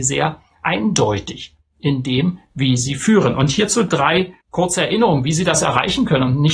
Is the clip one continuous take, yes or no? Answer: no